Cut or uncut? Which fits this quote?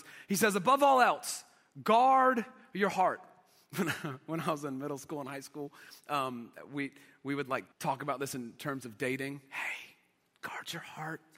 cut